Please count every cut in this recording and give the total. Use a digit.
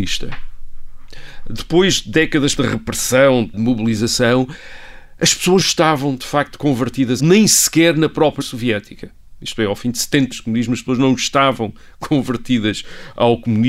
6